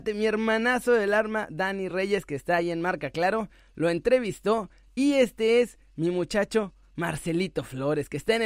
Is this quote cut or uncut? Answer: uncut